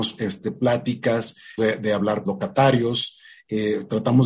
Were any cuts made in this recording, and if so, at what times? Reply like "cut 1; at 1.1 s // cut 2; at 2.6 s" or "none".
cut 1; at 1.6 s // cut 2; at 2.2 s